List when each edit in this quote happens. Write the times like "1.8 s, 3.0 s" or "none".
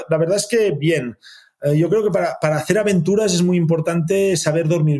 none